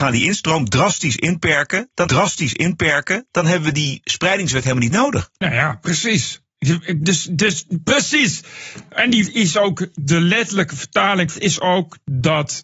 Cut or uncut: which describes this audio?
cut